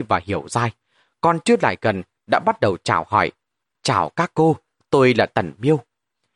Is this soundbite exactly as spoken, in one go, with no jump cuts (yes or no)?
yes